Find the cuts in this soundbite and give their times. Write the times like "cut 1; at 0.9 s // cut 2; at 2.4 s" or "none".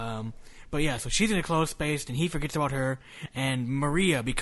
none